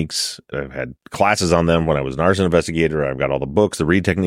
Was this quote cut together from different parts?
yes; 1 cut; at 1.0 s

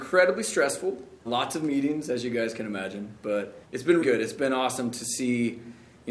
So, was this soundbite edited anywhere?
yes; 3 cuts; at 1.3 s, 3.6 s, 4.0 s

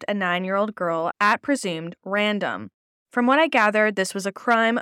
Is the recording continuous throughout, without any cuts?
yes; 0 cuts

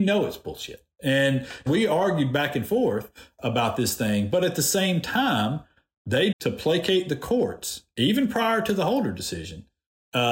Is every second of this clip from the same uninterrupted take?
no; 2 cuts; at 1.7 s, 6.3 s

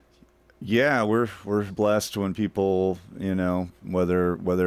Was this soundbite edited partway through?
yes; 1 cut; at 1.7 s

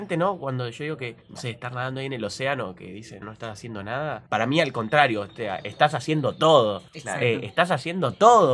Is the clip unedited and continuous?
no; 4 cuts; at 1.2 s, 3.2 s, 4.3 s, 6.9 s

